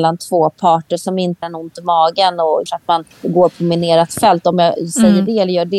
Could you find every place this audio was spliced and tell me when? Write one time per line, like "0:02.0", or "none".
0:01.4
0:02.7
0:03.1